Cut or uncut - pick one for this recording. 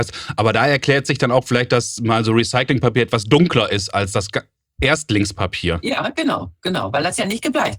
uncut